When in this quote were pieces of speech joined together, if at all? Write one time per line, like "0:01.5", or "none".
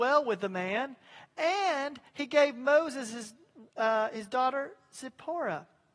0:02.1